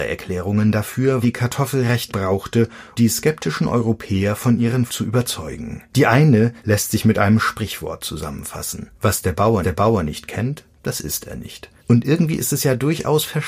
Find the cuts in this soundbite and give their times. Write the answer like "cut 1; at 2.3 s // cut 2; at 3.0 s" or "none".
cut 1; at 1.2 s // cut 2; at 2.1 s // cut 3; at 3.0 s // cut 4; at 4.9 s // cut 5; at 5.9 s // cut 6; at 6.6 s // cut 7; at 8.9 s // cut 8; at 9.6 s // cut 9; at 11.8 s